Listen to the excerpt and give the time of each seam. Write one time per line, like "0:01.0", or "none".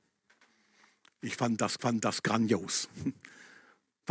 0:01.8